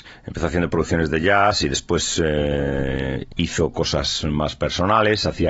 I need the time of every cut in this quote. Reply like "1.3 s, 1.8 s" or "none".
none